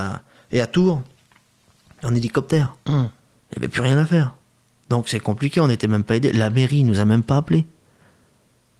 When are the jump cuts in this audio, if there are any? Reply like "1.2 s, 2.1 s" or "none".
none

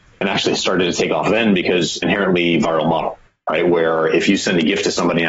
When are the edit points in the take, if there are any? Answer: 2.0 s

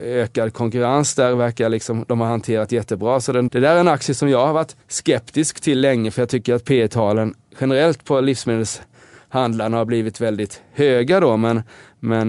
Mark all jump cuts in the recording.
3.5 s, 4.8 s

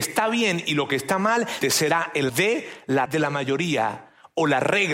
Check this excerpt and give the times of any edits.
1.6 s, 2.3 s, 3.1 s

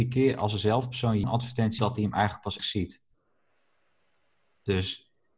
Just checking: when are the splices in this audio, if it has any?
1.2 s, 1.8 s, 2.6 s

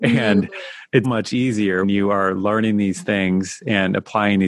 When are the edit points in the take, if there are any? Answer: 1.0 s, 1.8 s

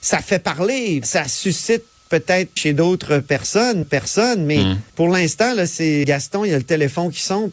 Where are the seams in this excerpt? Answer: 1.0 s, 2.6 s, 3.8 s, 4.9 s, 6.0 s

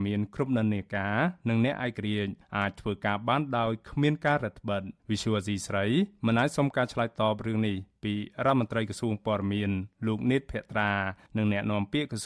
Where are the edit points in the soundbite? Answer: 5.0 s

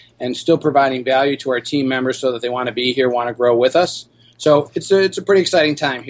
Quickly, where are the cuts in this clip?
none

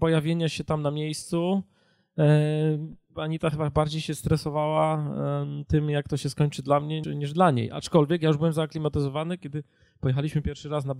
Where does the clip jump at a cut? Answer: 7.0 s

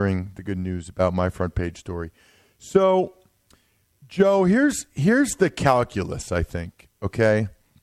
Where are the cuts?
none

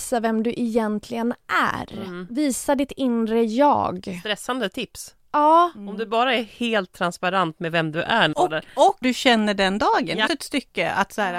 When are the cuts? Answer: 8.3 s, 9.0 s, 10.3 s

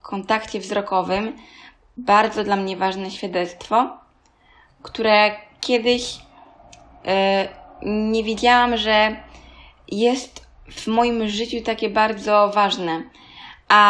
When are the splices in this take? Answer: none

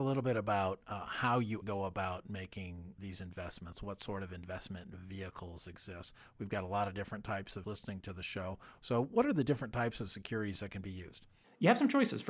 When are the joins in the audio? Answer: 1.6 s, 3.0 s, 7.6 s

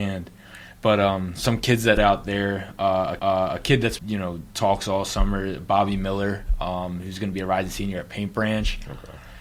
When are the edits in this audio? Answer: 2.0 s, 3.2 s, 4.0 s

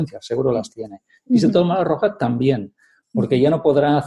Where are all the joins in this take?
none

